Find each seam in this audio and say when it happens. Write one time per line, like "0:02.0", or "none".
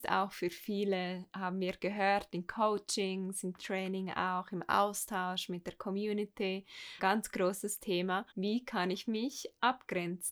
0:03.6
0:07.0
0:08.3